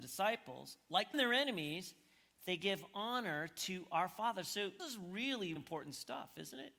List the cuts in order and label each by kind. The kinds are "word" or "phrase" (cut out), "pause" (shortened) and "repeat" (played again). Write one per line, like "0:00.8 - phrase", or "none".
0:01.1 - word
0:04.8 - word
0:05.6 - word